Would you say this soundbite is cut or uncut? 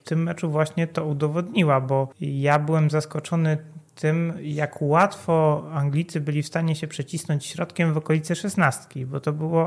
cut